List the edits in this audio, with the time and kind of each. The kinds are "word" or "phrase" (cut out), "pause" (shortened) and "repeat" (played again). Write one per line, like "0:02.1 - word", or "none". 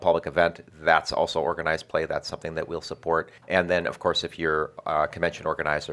0:03.4 - pause